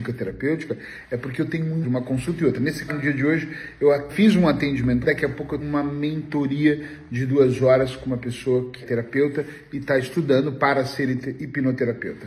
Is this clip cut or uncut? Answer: cut